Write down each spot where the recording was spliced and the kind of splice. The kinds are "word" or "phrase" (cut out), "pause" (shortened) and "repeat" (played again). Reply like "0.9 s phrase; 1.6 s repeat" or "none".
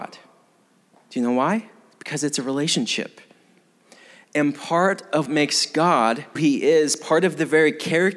5.3 s word; 6.3 s word